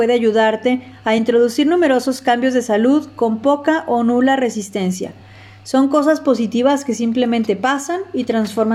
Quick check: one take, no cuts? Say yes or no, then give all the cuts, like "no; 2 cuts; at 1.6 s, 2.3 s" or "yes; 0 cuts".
yes; 0 cuts